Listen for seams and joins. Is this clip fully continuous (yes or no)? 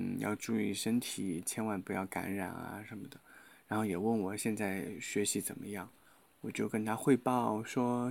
yes